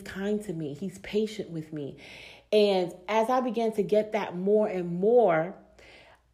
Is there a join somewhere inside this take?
no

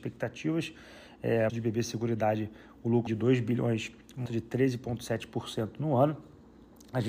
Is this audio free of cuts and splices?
no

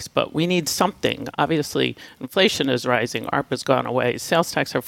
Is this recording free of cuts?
yes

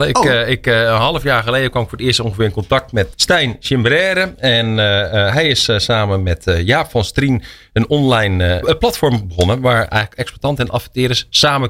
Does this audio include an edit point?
yes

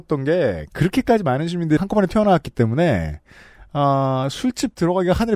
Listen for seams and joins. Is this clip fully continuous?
no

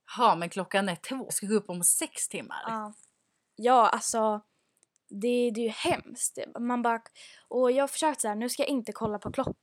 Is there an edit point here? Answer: yes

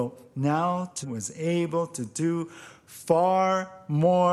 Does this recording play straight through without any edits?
no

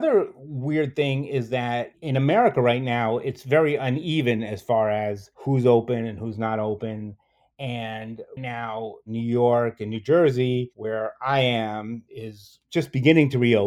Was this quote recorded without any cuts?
no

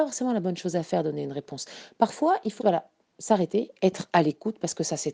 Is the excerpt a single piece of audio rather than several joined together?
no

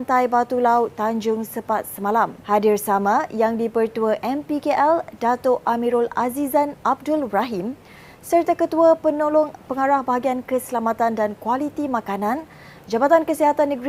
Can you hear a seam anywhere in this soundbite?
yes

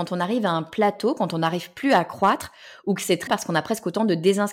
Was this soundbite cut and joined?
yes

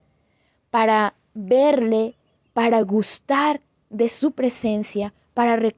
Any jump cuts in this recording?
no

